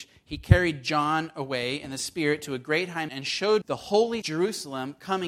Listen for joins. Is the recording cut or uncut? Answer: cut